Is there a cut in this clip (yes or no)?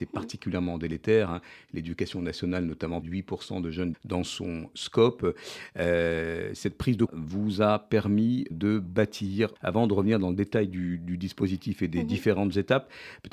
yes